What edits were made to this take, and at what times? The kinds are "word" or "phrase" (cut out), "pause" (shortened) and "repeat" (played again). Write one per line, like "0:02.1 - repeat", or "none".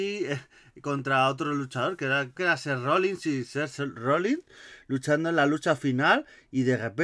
0:02.4 - word